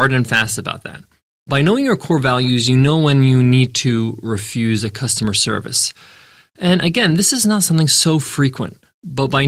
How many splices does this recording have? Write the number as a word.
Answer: zero